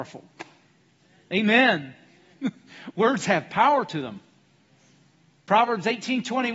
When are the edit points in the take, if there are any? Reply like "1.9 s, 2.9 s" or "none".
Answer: none